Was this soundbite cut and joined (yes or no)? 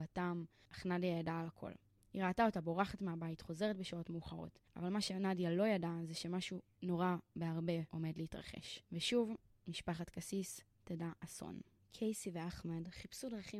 no